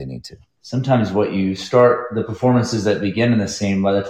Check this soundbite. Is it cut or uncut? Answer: uncut